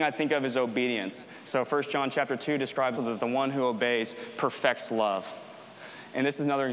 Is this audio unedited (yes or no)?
no